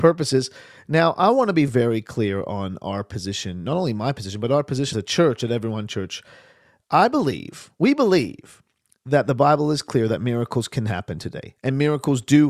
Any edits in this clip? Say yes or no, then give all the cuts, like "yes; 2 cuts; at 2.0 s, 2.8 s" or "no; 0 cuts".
yes; 2 cuts; at 1.7 s, 4.9 s